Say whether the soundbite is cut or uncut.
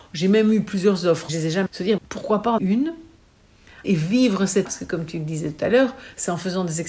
cut